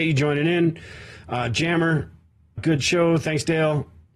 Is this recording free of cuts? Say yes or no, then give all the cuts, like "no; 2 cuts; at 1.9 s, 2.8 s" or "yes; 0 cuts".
no; 1 cut; at 2.6 s